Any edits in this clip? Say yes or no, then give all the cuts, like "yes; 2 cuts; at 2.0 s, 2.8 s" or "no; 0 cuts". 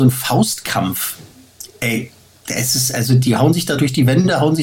no; 0 cuts